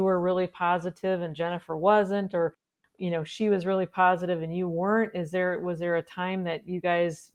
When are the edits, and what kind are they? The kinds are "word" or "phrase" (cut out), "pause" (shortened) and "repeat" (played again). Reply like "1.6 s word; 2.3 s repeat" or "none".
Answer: none